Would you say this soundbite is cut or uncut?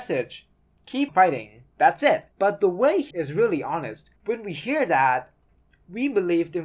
cut